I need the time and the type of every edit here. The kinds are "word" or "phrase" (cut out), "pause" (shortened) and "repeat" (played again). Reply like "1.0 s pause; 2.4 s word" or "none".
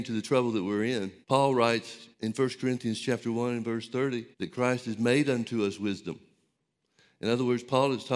1.2 s pause; 2.1 s pause; 4.3 s pause